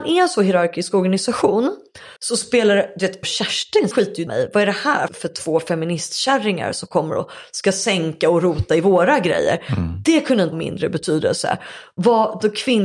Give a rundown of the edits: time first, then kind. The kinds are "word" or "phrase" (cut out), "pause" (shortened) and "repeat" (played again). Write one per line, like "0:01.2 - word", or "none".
0:02.2 - pause
0:03.2 - phrase
0:03.9 - phrase
0:04.3 - word
0:05.1 - word
0:10.5 - word

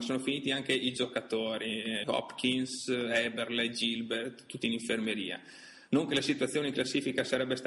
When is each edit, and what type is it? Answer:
0:02.0 - word

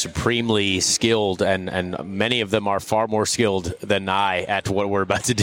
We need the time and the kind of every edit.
none

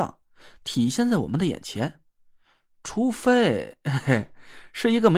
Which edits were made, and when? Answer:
none

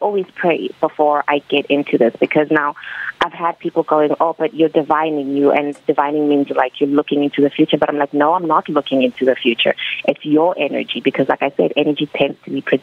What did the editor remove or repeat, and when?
none

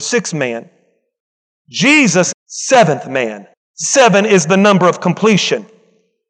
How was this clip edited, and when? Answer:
0:02.3 - phrase
0:03.5 - pause

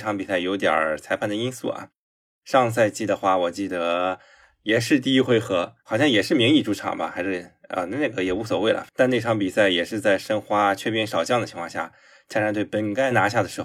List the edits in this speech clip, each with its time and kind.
0:05.8 - pause

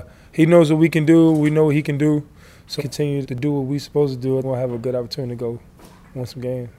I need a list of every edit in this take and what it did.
0:02.8 - word
0:03.2 - word
0:04.4 - word

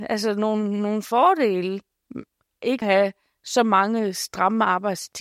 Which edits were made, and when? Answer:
0:02.8 - word

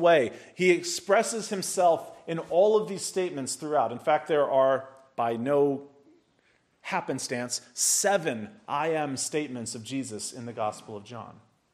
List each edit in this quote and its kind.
none

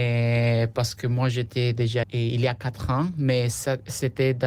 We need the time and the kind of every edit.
0:02.0 - word

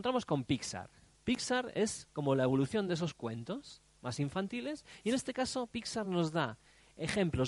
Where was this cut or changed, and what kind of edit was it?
none

